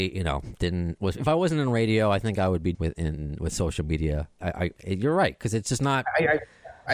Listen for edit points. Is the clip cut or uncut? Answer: cut